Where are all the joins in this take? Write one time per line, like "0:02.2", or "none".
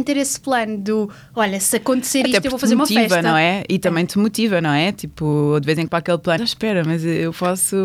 0:05.9
0:06.4